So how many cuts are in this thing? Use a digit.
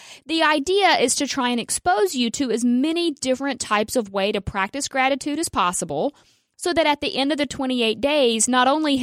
0